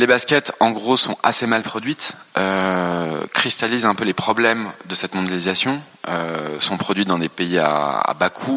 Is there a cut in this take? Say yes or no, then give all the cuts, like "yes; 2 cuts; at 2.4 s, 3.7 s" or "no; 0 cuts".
no; 0 cuts